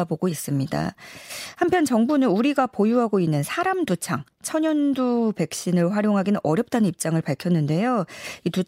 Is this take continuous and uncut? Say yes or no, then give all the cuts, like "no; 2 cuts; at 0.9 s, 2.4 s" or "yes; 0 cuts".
yes; 0 cuts